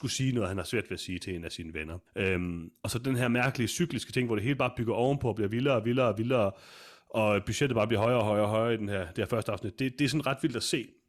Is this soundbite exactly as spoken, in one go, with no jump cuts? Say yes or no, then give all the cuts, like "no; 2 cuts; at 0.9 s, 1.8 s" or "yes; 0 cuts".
no; 1 cut; at 2.1 s